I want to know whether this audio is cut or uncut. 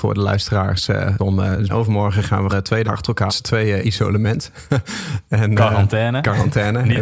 cut